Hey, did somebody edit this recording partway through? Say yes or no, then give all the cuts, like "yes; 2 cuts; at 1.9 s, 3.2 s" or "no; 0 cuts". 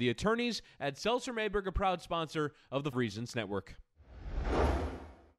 yes; 2 cuts; at 2.9 s, 3.3 s